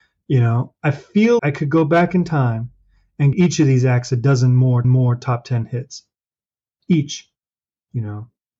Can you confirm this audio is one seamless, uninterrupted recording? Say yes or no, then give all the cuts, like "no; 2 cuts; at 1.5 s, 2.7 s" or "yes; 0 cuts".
no; 3 cuts; at 1.4 s, 3.3 s, 4.8 s